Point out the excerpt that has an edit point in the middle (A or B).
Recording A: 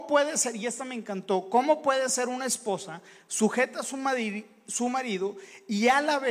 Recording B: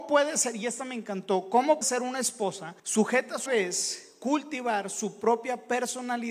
B